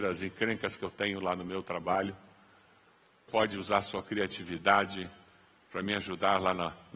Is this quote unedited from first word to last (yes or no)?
no